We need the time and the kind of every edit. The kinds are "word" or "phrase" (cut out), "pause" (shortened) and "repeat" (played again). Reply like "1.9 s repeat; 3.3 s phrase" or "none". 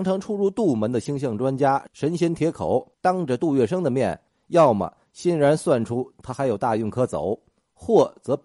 2.9 s pause